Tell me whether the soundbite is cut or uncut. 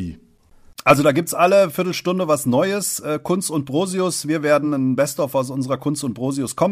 uncut